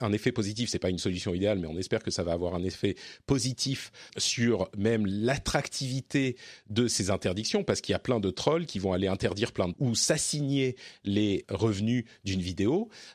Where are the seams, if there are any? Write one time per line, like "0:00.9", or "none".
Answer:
0:04.1
0:09.7
0:11.4